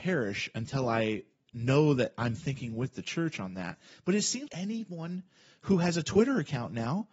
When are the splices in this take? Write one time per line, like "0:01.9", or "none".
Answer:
0:04.5